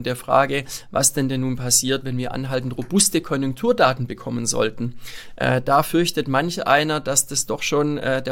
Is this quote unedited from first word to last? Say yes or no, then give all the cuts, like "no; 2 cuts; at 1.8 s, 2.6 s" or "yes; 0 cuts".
yes; 0 cuts